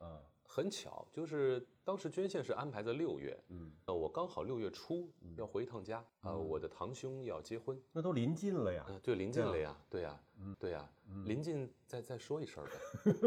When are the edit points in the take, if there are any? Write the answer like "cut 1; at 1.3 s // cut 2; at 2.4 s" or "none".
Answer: cut 1; at 3.9 s // cut 2; at 6.1 s // cut 3; at 10.5 s